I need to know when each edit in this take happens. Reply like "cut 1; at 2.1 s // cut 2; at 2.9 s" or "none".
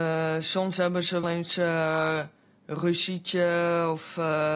cut 1; at 1.2 s

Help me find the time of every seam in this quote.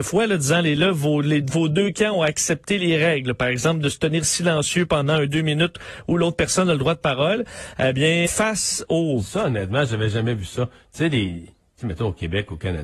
cut 1; at 8.3 s

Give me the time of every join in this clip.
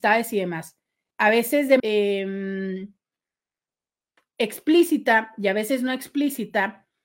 cut 1; at 1.1 s // cut 2; at 1.8 s

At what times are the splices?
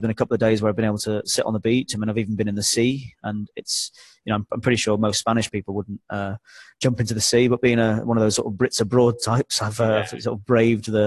none

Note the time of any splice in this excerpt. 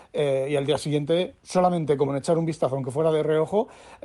cut 1; at 1.4 s // cut 2; at 2.1 s

